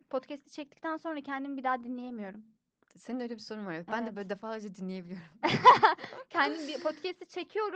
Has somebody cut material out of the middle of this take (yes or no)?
no